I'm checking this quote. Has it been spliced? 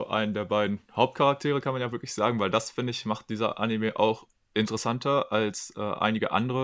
no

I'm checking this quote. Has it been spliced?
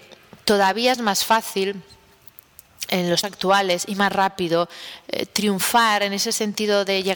yes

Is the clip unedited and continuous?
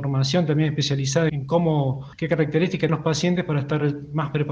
no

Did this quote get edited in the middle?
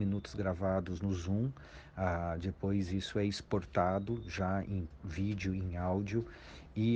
no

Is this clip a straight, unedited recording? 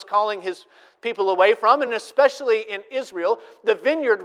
yes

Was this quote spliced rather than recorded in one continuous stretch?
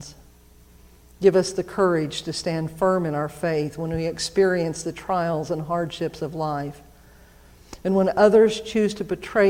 no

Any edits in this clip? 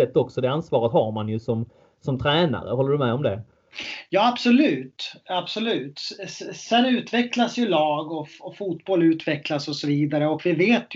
no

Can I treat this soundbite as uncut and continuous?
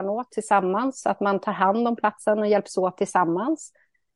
yes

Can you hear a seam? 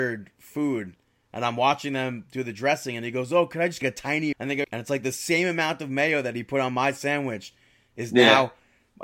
yes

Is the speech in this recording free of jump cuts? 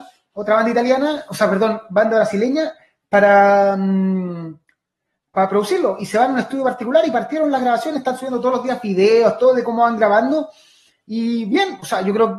yes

